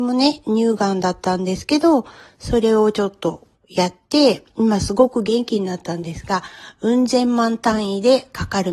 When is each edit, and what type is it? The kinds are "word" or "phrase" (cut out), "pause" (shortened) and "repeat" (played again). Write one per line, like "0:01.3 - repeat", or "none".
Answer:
none